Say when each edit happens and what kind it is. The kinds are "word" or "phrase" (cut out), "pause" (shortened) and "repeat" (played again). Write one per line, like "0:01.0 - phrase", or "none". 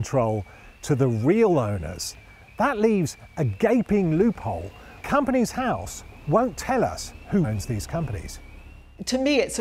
0:05.0 - word
0:07.4 - word